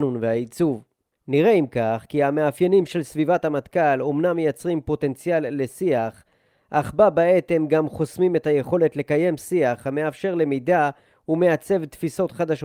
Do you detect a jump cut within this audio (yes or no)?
no